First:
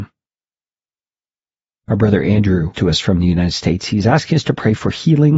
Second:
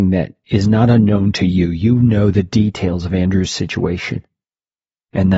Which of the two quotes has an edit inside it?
first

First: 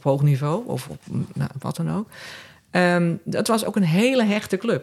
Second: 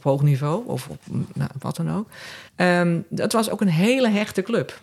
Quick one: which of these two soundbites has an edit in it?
second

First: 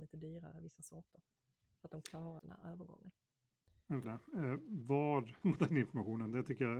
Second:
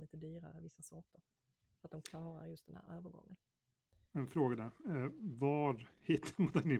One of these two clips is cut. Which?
first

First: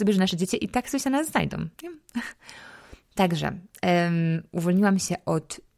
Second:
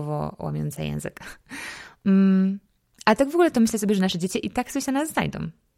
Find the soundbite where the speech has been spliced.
first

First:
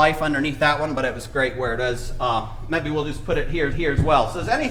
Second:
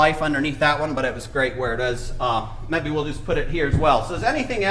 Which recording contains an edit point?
first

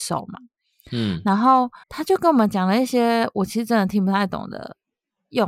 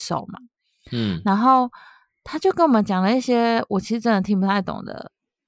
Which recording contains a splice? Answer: first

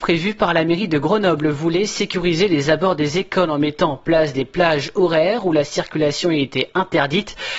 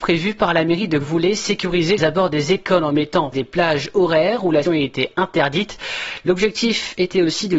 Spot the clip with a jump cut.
second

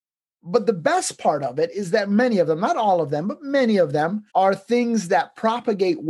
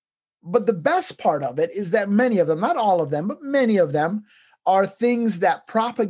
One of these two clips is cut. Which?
first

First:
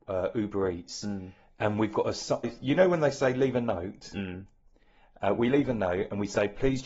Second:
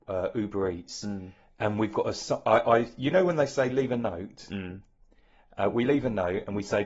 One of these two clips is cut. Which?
first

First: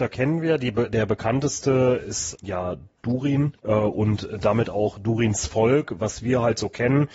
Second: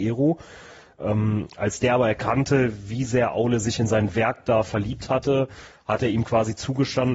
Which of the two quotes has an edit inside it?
first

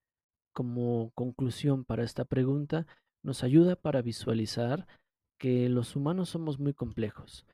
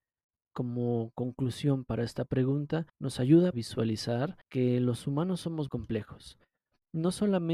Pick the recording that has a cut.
second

